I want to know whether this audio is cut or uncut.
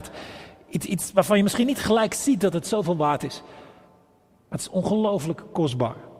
uncut